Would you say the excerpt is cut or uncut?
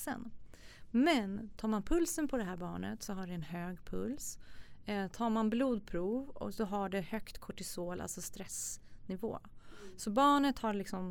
uncut